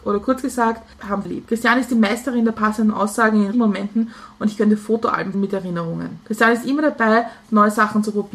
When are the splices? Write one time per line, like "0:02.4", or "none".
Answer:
0:01.2
0:03.5
0:05.3